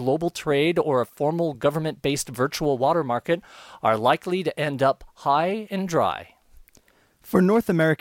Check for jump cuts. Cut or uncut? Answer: uncut